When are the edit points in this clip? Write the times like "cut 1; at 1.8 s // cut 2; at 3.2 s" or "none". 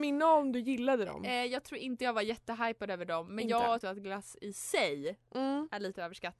cut 1; at 3.8 s